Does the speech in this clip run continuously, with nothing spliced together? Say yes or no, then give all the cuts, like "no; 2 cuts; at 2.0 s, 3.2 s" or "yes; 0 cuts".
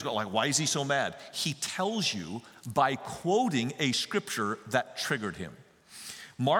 yes; 0 cuts